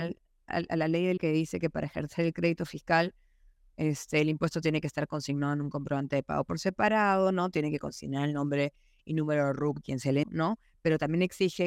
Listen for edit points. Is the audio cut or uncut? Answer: cut